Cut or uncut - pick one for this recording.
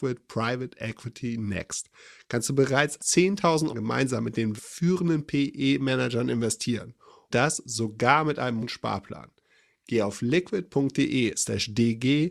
cut